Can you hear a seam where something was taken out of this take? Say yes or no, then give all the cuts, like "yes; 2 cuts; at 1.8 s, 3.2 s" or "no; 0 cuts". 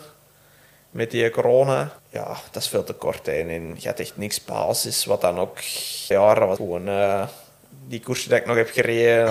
yes; 3 cuts; at 2.0 s, 6.1 s, 6.6 s